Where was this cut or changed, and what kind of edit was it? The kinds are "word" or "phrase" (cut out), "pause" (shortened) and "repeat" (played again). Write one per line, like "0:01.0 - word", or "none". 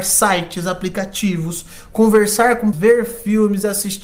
0:02.7 - word